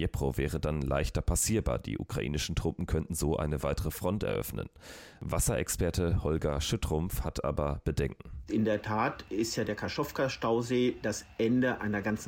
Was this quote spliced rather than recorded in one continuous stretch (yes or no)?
no